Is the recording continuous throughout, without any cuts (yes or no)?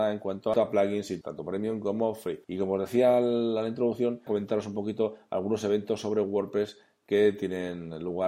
no